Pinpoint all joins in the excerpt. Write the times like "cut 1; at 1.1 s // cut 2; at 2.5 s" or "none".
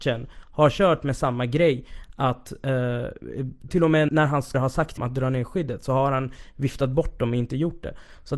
cut 1; at 3.7 s // cut 2; at 4.1 s // cut 3; at 4.5 s // cut 4; at 5.0 s